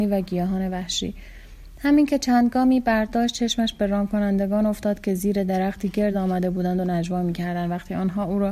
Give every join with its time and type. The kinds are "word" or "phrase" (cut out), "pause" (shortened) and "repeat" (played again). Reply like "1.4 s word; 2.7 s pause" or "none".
none